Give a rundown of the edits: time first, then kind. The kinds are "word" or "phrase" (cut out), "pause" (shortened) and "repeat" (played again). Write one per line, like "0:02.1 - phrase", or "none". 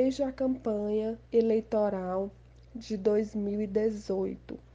0:01.3 - pause